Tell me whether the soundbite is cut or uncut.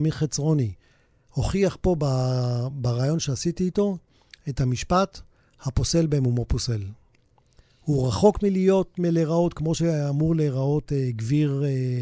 uncut